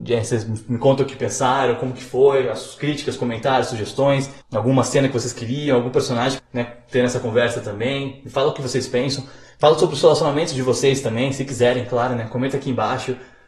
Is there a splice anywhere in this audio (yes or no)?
yes